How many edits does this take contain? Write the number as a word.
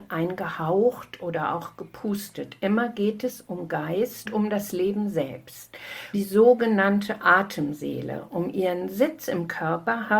two